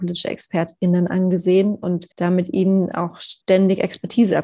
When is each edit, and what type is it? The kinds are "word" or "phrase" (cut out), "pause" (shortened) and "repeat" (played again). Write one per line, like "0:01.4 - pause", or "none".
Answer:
0:02.1 - pause
0:03.4 - pause